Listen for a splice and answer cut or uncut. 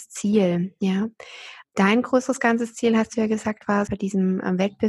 cut